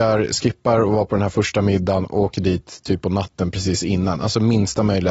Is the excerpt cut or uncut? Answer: uncut